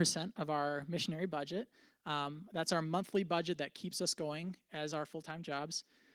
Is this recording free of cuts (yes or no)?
yes